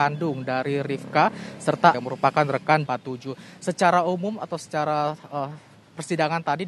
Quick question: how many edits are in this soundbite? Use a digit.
2